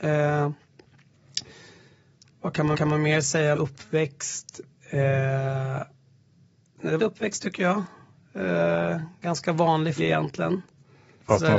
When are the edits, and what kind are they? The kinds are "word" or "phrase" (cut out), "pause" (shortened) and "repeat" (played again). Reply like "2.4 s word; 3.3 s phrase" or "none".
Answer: 2.7 s repeat; 3.5 s word; 7.0 s phrase; 10.0 s word